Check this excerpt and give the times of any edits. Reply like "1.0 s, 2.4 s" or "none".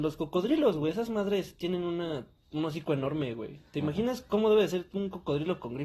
none